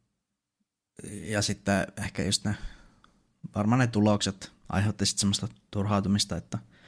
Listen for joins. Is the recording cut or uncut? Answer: uncut